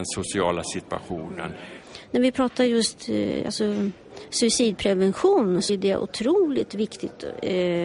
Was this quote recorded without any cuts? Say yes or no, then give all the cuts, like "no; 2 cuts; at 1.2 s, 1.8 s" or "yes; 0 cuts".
no; 1 cut; at 5.7 s